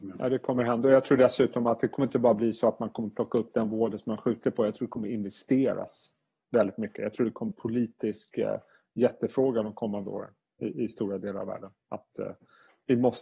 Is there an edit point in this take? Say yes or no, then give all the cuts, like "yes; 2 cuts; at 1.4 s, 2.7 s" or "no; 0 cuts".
yes; 1 cut; at 7.5 s